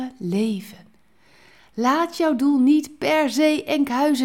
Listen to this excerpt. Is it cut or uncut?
uncut